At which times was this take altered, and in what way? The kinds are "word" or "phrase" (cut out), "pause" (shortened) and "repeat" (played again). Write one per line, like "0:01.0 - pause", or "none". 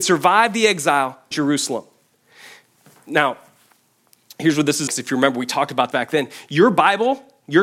0:01.3 - word
0:04.9 - word
0:05.9 - word